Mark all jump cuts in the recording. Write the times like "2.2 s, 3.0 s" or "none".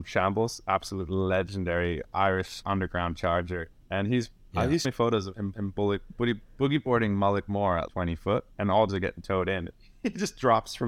2.6 s, 3.8 s, 4.8 s, 5.5 s, 7.9 s, 8.5 s, 8.9 s